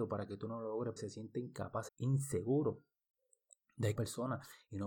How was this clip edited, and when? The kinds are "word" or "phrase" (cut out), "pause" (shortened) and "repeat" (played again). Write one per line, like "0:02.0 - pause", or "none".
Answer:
0:01.0 - word
0:01.9 - phrase
0:04.0 - word